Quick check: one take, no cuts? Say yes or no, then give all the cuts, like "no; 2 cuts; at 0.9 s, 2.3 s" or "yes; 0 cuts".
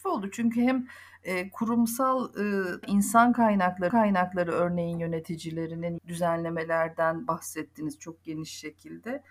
no; 3 cuts; at 2.8 s, 3.9 s, 6.0 s